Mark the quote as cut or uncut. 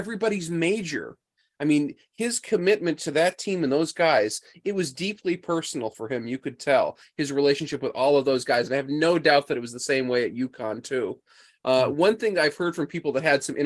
uncut